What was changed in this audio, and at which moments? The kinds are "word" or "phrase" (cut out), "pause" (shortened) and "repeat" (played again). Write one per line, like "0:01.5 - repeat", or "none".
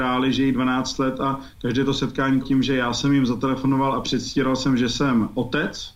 0:02.4 - word